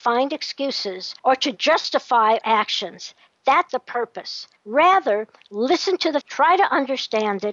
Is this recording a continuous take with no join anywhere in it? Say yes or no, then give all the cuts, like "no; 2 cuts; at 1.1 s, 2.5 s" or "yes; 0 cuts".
no; 5 cuts; at 1.2 s, 2.4 s, 3.7 s, 4.6 s, 6.2 s